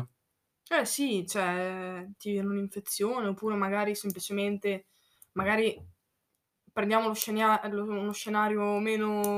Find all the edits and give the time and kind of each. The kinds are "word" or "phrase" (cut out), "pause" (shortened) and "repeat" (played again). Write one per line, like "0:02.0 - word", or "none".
none